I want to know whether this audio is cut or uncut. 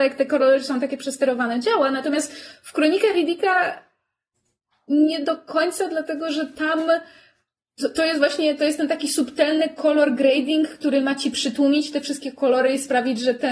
uncut